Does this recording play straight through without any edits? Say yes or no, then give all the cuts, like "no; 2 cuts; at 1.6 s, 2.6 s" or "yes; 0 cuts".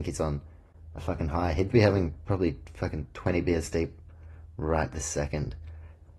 yes; 0 cuts